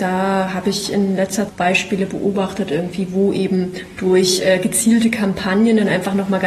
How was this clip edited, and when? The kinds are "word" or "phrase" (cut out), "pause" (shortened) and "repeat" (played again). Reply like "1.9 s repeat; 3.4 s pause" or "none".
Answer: 1.5 s phrase

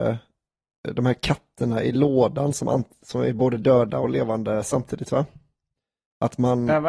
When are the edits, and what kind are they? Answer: none

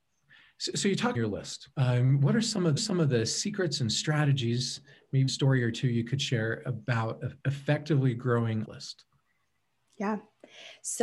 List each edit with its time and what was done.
1.1 s phrase; 1.7 s pause; 2.8 s repeat; 5.3 s phrase; 7.4 s pause; 8.6 s phrase

